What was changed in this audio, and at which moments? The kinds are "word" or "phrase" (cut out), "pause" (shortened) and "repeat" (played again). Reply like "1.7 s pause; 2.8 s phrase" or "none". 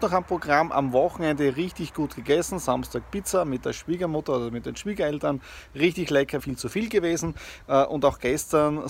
6.4 s word